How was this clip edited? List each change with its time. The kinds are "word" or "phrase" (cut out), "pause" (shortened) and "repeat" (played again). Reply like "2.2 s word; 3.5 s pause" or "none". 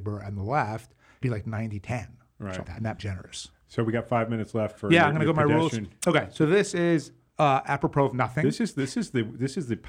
1.2 s word; 2.6 s word; 3.0 s phrase